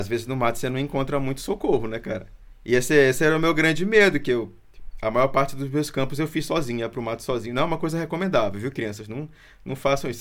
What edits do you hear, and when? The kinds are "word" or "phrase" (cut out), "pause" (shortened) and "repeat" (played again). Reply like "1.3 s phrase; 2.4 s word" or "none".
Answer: 2.5 s pause